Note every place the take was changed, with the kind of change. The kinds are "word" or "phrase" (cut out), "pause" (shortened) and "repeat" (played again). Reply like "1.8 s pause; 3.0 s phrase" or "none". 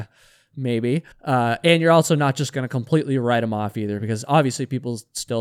1.1 s pause